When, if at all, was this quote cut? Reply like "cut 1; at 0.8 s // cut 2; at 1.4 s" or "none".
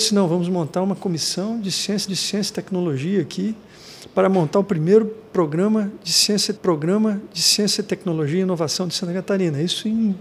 cut 1; at 2.1 s // cut 2; at 6.6 s